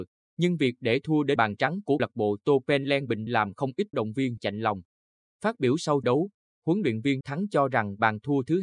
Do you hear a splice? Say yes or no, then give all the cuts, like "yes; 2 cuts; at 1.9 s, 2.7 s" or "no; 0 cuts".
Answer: yes; 7 cuts; at 1.4 s, 2.0 s, 3.3 s, 3.9 s, 4.4 s, 6.0 s, 7.2 s